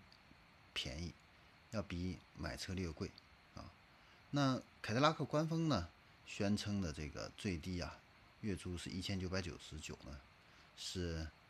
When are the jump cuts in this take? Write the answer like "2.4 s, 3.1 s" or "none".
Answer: 3.4 s